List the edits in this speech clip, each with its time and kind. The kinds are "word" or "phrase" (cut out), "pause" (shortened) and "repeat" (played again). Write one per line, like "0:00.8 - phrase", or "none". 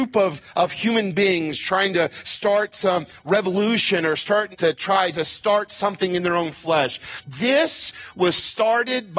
0:04.5 - word